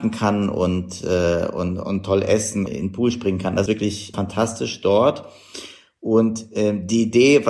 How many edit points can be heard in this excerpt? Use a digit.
3